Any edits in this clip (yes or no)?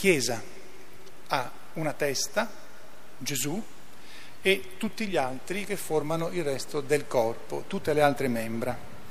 no